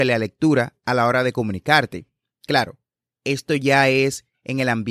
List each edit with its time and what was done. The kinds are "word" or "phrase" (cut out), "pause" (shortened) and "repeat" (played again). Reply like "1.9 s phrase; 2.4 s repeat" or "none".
none